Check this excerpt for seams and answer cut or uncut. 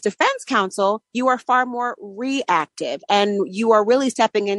cut